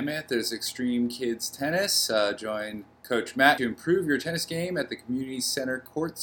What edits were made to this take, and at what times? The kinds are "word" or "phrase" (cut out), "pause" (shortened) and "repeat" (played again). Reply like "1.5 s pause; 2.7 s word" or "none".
3.6 s phrase